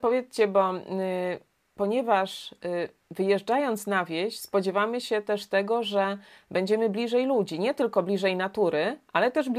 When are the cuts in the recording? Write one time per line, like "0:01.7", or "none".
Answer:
none